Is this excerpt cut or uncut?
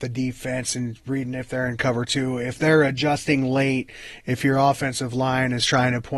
uncut